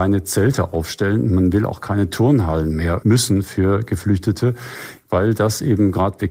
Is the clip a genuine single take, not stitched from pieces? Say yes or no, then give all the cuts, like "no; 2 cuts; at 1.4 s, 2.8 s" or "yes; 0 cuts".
no; 1 cut; at 3.0 s